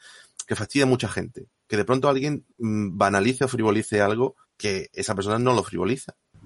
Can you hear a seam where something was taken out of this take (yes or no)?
yes